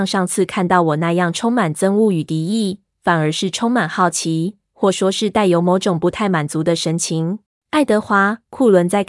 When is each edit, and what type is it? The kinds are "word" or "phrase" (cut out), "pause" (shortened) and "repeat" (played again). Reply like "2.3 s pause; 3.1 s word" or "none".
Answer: 7.5 s pause